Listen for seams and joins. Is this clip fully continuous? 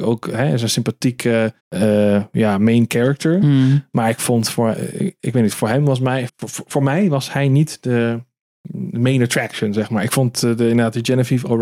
no; 2 cuts; at 1.6 s, 6.3 s

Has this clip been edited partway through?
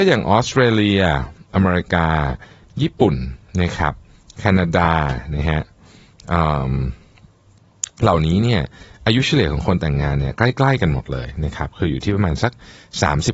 no; 0 cuts

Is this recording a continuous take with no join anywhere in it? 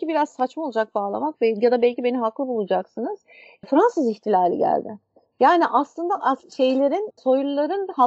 yes; 0 cuts

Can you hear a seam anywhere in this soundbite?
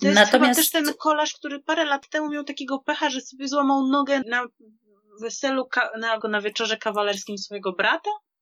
yes; 2 cuts; at 4.2 s, 6.2 s

